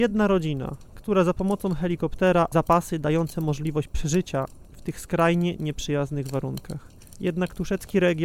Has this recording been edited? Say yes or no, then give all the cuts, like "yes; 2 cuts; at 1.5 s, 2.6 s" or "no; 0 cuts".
yes; 1 cut; at 2.5 s